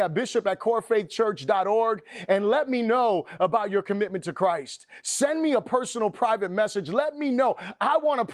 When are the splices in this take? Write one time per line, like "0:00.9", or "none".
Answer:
none